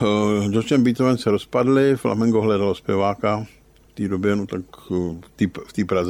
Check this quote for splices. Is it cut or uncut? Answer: uncut